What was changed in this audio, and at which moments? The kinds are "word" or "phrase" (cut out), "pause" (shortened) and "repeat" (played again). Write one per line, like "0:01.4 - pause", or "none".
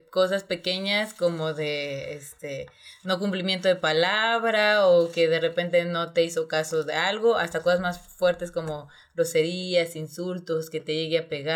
none